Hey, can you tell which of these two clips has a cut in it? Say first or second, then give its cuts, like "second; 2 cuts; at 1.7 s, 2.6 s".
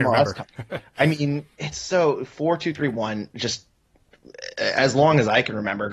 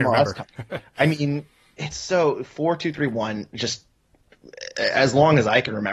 first; 1 cut; at 1.5 s